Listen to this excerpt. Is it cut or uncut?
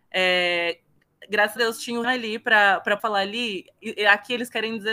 cut